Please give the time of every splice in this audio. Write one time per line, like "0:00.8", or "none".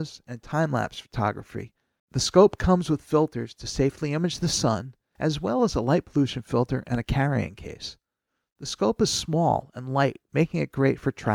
none